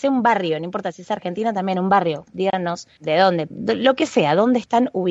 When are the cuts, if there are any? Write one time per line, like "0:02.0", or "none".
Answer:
0:03.0
0:03.5